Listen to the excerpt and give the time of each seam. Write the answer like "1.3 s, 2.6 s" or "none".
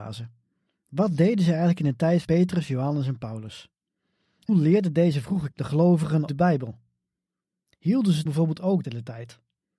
2.2 s, 4.5 s, 5.5 s, 6.3 s, 8.3 s, 8.8 s